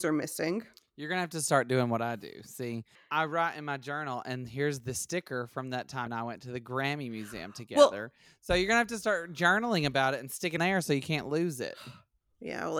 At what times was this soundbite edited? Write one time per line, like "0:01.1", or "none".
0:06.1
0:10.6

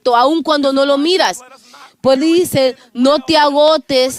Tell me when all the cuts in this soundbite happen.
0:02.2

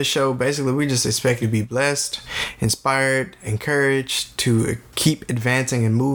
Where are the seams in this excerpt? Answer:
0:01.4
0:03.5

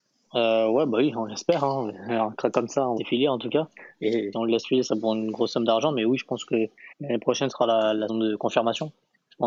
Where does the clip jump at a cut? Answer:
0:03.0
0:04.3
0:04.9
0:06.9
0:07.5
0:08.1

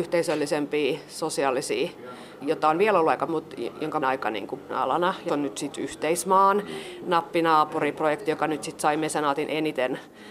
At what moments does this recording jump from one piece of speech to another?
0:02.4
0:03.3
0:04.0
0:04.7
0:05.3
0:05.7

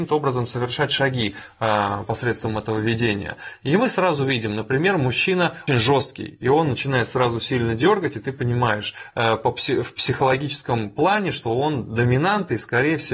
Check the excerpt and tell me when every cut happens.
0:05.7

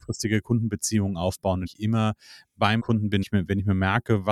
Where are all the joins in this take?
0:01.7
0:02.8
0:03.2

